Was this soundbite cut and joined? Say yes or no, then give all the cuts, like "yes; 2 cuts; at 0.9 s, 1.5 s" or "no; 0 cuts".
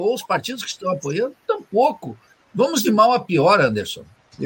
no; 0 cuts